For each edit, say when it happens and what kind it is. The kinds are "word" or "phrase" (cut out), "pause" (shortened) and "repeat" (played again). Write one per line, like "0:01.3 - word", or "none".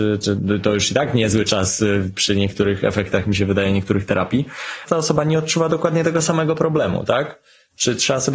none